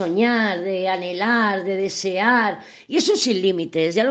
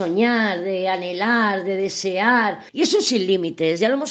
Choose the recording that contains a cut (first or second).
second